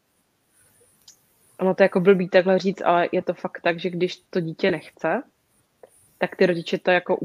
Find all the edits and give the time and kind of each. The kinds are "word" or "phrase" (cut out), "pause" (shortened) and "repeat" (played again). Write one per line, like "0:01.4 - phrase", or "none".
0:04.3 - pause